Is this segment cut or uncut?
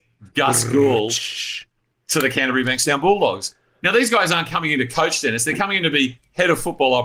uncut